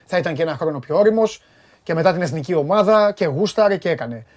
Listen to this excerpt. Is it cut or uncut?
uncut